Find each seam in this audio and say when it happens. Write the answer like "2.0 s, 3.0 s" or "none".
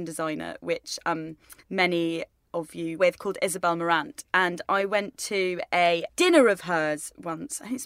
1.6 s, 3.0 s

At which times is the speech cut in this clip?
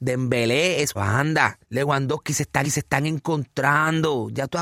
0.9 s, 1.6 s, 2.6 s

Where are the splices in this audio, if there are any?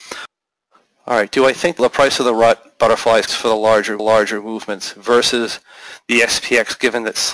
1.8 s, 3.3 s, 4.0 s

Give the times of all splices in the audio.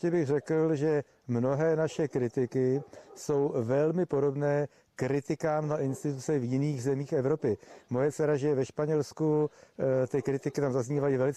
none

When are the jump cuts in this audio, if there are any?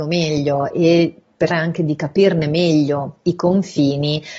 1.5 s, 3.2 s

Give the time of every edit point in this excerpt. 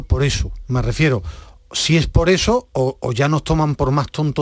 none

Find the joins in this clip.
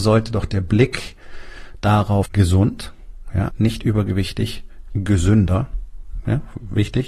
2.2 s, 3.5 s, 4.9 s

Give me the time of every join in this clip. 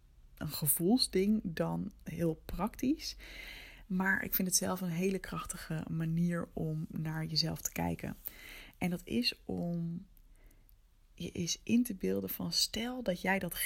none

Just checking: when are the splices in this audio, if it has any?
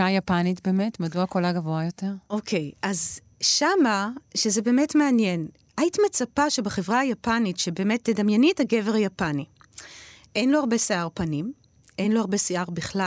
none

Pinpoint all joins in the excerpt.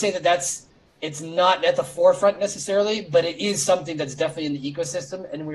none

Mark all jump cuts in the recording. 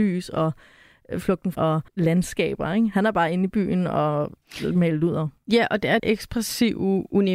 1.6 s, 1.9 s, 6.0 s

